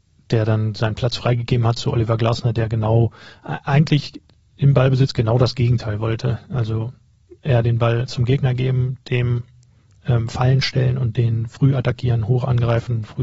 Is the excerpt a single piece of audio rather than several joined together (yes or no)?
yes